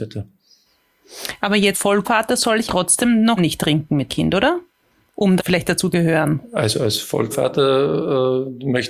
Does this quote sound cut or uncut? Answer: cut